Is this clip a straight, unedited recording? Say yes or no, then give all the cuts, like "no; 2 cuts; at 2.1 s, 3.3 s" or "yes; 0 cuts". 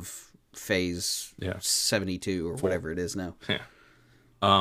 yes; 0 cuts